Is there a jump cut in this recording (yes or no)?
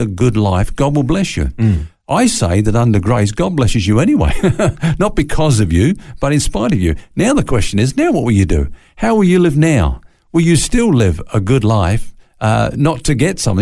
no